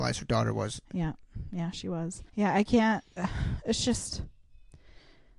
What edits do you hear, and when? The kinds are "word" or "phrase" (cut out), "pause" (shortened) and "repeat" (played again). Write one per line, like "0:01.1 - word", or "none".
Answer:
0:02.3 - pause